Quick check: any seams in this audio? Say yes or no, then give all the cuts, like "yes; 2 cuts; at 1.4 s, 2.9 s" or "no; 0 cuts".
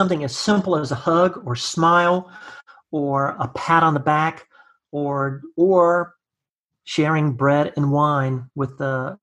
no; 0 cuts